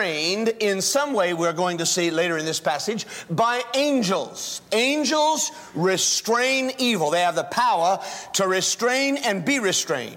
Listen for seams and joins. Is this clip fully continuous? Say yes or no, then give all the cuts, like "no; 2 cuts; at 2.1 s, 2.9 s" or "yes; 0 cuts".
yes; 0 cuts